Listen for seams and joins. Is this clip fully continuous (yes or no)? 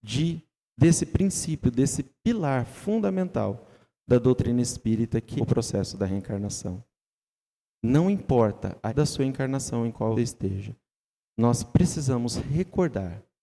no